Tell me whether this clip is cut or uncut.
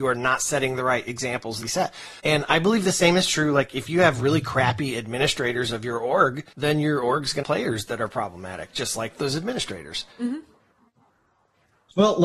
cut